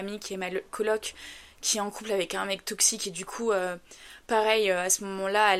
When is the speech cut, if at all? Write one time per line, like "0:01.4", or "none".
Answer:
none